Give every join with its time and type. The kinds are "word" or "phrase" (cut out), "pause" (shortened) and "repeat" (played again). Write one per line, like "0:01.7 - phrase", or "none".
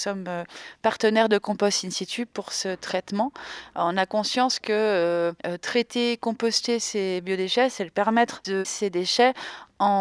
0:05.4 - pause
0:08.6 - word